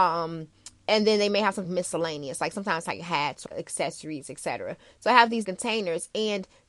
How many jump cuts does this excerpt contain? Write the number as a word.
three